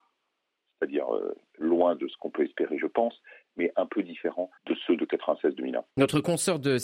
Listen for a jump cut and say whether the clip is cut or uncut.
cut